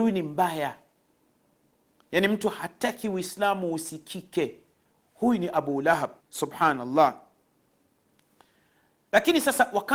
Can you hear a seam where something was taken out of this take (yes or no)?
yes